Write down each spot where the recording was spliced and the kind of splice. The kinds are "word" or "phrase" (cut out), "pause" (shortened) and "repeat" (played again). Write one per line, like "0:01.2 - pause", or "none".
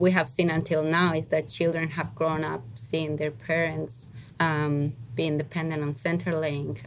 0:04.3 - pause